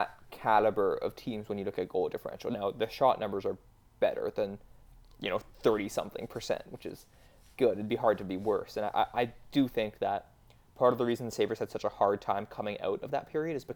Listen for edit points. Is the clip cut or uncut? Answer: uncut